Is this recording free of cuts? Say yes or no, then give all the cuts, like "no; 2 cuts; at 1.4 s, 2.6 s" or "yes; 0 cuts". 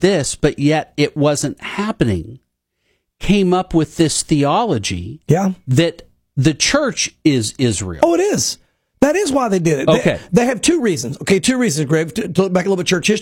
yes; 0 cuts